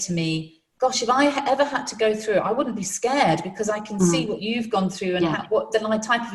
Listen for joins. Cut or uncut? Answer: uncut